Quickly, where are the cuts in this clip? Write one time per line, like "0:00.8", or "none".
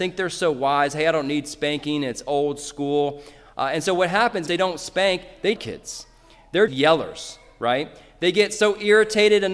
0:04.5
0:05.6
0:06.7